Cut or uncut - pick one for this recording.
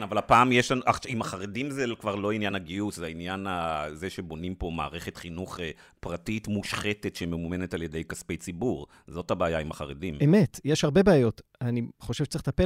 uncut